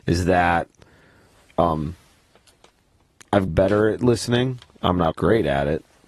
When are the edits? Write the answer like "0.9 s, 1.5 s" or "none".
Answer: 3.5 s, 5.1 s